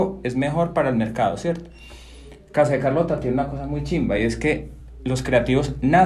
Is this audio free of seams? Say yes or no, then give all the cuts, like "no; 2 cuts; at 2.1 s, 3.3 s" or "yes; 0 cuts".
yes; 0 cuts